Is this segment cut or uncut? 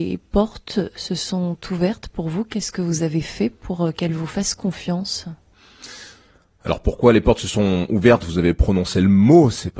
uncut